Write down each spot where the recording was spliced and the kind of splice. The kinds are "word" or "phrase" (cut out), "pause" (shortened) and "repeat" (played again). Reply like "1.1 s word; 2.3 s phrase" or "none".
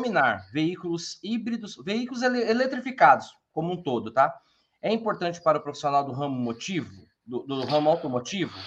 none